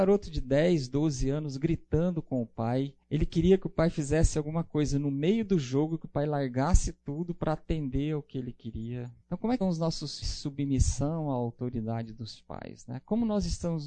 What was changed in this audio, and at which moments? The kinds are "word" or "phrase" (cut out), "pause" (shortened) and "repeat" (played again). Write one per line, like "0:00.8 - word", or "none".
0:03.0 - pause
0:09.2 - pause
0:09.6 - word
0:10.2 - phrase